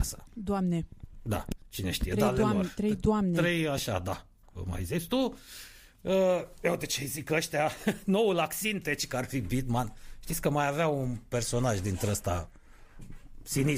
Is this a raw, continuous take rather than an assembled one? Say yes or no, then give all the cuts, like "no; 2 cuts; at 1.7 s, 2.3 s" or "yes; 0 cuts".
yes; 0 cuts